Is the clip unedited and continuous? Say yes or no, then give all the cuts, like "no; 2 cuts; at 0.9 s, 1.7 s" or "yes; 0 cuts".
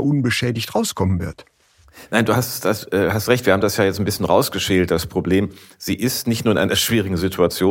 yes; 0 cuts